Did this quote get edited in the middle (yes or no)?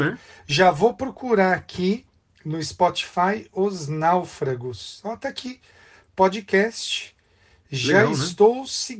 no